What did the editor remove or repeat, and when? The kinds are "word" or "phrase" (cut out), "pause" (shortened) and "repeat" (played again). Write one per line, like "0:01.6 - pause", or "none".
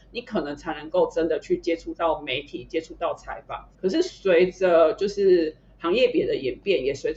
0:03.7 - pause